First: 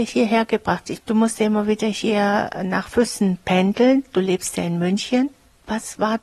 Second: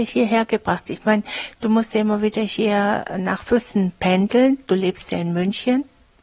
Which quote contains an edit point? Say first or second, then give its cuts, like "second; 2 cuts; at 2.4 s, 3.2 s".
first; 1 cut; at 1.0 s